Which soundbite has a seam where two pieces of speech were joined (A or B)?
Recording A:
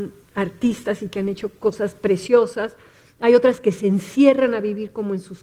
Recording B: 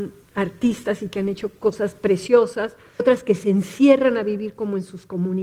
B